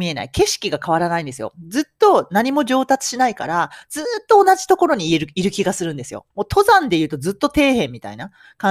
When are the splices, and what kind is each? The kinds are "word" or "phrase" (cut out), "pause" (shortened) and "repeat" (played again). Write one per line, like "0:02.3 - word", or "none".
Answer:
0:06.3 - pause